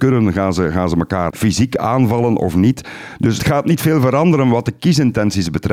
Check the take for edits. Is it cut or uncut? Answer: cut